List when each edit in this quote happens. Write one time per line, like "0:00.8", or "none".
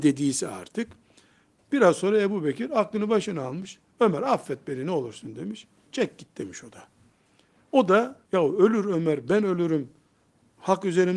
0:08.2